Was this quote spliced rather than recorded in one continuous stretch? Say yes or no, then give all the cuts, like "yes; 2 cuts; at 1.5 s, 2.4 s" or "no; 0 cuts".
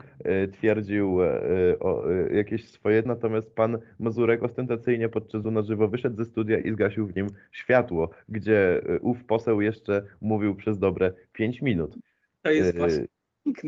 yes; 2 cuts; at 3.0 s, 5.4 s